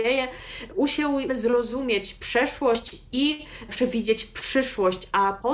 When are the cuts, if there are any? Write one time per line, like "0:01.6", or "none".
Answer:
0:01.3
0:03.7